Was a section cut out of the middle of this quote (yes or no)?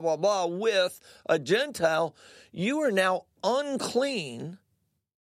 no